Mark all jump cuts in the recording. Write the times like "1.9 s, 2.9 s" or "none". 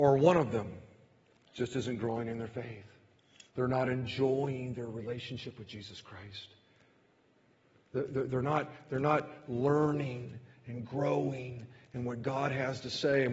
1.3 s, 3.5 s